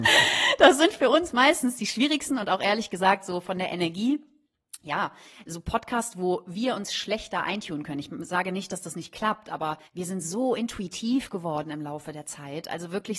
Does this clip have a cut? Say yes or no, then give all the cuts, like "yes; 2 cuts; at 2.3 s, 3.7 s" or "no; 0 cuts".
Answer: yes; 1 cut; at 9.9 s